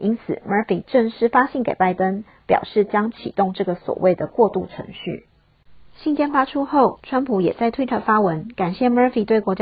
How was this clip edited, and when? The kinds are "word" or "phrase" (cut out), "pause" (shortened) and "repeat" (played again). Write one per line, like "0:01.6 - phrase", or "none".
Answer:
none